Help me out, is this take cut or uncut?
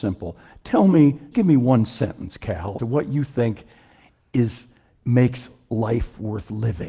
cut